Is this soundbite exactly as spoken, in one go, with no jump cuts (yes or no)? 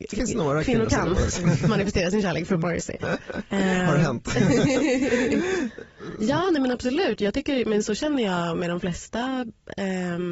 yes